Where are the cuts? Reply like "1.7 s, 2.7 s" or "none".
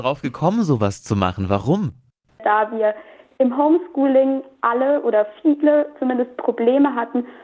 none